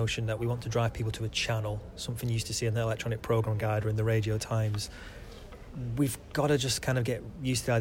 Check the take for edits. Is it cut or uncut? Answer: uncut